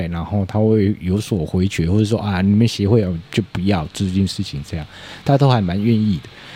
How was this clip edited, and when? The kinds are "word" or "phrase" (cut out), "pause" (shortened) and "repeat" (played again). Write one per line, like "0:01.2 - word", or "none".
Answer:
0:03.2 - pause